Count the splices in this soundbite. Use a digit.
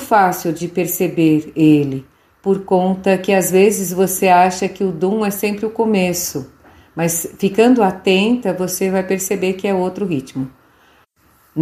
0